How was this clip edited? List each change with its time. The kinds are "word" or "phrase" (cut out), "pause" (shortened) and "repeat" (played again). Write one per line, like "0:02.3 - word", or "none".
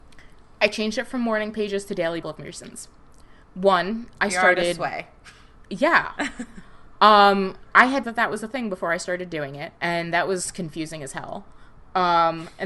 0:02.2 - phrase
0:03.4 - pause
0:05.7 - pause
0:08.0 - phrase
0:09.8 - pause